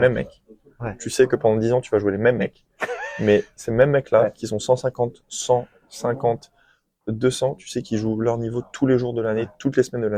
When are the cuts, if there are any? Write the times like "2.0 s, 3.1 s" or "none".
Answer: none